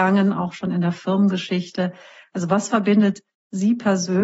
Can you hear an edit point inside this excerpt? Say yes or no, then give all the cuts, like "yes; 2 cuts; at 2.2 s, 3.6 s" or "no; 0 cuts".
no; 0 cuts